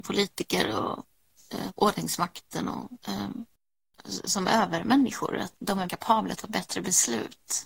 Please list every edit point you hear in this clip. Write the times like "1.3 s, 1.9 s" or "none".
1.7 s, 3.0 s, 5.5 s, 5.9 s, 6.4 s